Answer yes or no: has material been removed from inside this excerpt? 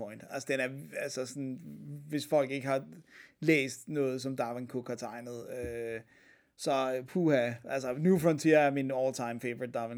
no